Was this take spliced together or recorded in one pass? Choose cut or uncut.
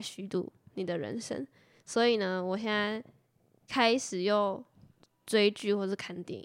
uncut